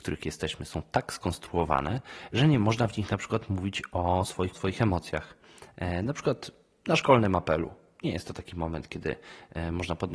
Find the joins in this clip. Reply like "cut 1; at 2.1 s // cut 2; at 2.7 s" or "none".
cut 1; at 4.5 s